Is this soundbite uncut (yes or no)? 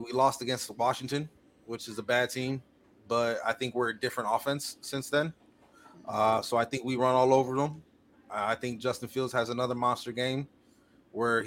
yes